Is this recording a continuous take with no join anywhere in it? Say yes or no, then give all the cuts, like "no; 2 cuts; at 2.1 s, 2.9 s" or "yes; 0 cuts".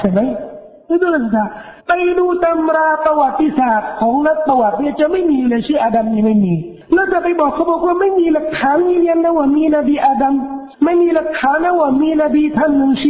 no; 3 cuts; at 1.8 s, 6.8 s, 10.7 s